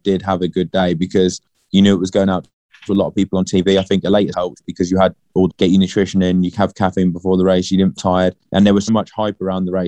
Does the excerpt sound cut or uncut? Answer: cut